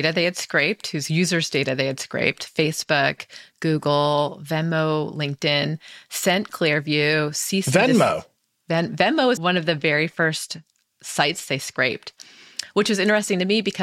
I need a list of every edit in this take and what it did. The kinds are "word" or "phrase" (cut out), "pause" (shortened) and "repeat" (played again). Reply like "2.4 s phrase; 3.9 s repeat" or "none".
9.4 s word